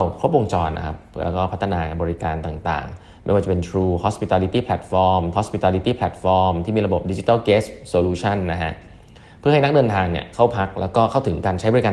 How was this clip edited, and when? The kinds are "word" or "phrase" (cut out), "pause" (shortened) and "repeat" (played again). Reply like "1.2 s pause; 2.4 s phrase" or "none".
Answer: 5.3 s repeat